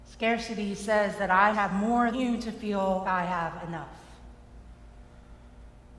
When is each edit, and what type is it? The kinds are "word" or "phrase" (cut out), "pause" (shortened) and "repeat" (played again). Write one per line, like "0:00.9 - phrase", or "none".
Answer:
0:01.5 - word
0:02.1 - word
0:03.0 - word